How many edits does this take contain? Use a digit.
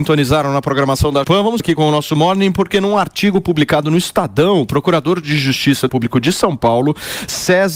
3